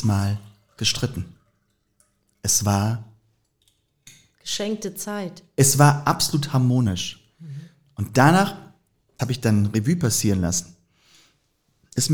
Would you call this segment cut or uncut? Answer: cut